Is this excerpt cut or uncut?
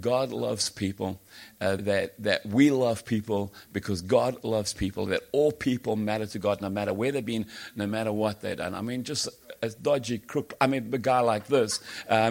cut